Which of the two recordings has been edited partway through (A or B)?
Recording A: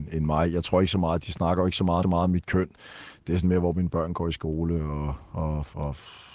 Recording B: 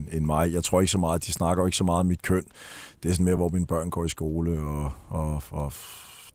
A